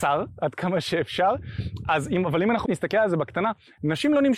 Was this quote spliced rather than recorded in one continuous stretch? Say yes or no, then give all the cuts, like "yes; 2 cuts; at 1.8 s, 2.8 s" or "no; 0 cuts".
yes; 1 cut; at 2.7 s